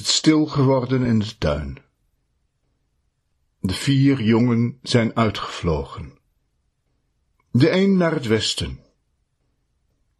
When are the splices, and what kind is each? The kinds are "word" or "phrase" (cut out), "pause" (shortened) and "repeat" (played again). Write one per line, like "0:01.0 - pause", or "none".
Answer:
none